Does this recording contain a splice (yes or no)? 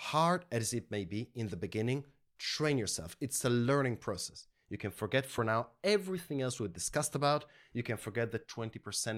no